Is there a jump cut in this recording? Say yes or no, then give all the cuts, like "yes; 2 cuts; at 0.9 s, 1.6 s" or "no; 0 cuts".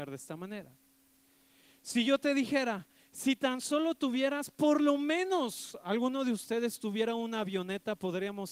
no; 0 cuts